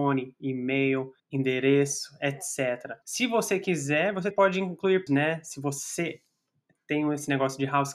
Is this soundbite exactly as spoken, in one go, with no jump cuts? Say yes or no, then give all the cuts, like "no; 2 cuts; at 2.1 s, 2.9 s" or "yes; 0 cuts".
no; 4 cuts; at 1.2 s, 3.0 s, 4.3 s, 5.1 s